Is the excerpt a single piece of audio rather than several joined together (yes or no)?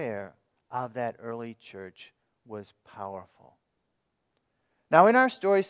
yes